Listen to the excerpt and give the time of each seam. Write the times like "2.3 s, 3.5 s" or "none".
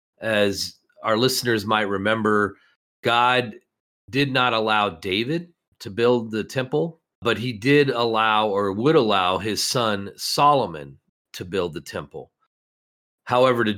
none